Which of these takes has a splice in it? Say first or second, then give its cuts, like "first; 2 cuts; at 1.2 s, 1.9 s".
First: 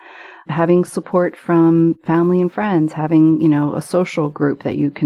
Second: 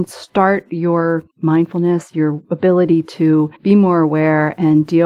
second; 2 cuts; at 1.3 s, 3.6 s